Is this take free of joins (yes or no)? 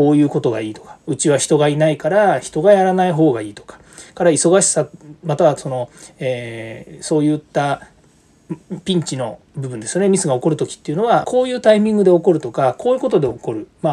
no